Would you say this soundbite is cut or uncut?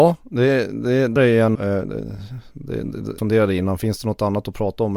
cut